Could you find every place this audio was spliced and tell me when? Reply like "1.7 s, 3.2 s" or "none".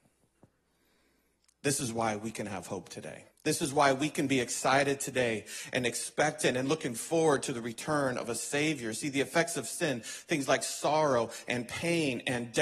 3.3 s